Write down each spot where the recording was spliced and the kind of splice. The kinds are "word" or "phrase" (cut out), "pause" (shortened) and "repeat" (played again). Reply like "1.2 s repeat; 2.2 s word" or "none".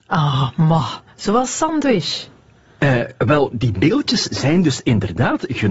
none